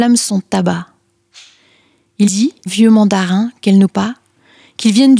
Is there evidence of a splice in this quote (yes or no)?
yes